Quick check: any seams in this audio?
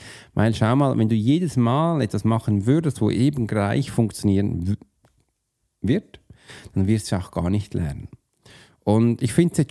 no; 0 cuts

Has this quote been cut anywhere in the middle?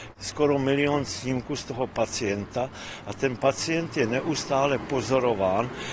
no; 0 cuts

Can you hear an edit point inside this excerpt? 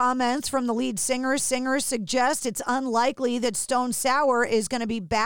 yes; 1 cut; at 1.4 s

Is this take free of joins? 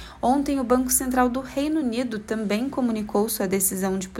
yes; 0 cuts

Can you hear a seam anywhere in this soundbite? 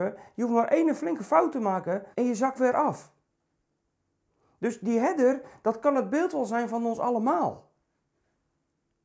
yes; 2 cuts; at 2.1 s, 2.6 s

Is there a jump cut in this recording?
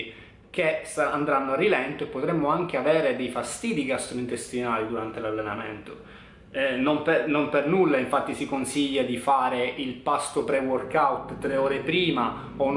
no; 0 cuts

